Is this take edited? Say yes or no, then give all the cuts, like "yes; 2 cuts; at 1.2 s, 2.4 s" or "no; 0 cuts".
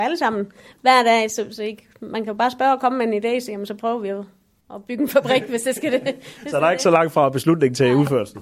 no; 0 cuts